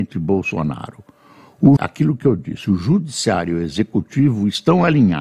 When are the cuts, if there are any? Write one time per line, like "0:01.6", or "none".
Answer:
0:01.8